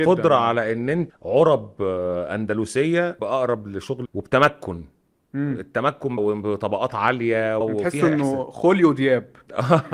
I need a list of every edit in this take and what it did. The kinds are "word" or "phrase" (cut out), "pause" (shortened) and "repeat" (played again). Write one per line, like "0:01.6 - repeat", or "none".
0:01.1 - word
0:03.2 - word
0:04.0 - word
0:06.2 - word
0:07.6 - word

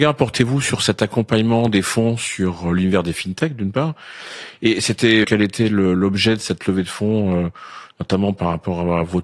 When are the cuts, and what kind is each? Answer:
0:05.2 - word

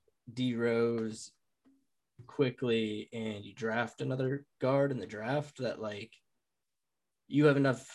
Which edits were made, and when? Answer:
none

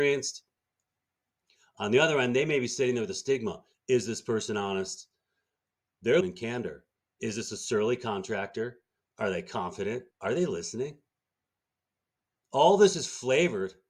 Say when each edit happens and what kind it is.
0:06.2 - phrase
0:06.9 - pause
0:10.1 - pause

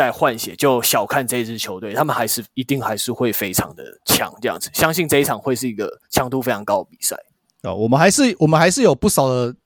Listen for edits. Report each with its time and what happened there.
none

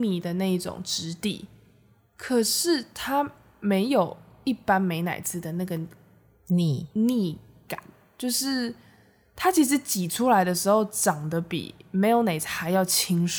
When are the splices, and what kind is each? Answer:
none

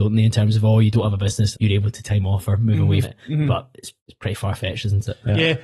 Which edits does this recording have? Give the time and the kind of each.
0:01.5 - word
0:02.0 - word
0:03.0 - word
0:04.0 - pause

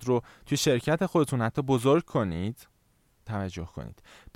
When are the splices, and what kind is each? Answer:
0:03.3 - phrase

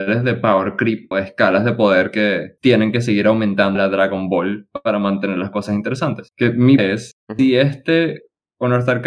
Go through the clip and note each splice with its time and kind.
0:01.1 - word
0:03.8 - phrase
0:06.8 - word

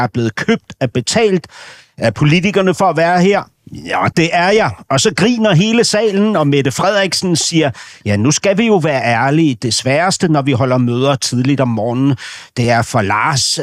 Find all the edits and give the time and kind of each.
none

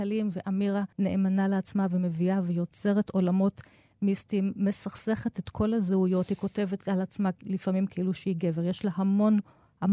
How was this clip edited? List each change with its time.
0:00.9 - pause

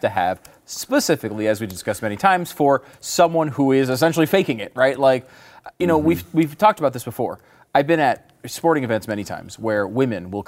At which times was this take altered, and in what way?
none

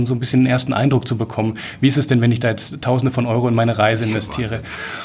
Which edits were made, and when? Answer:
none

